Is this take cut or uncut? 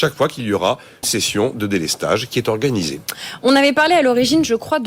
cut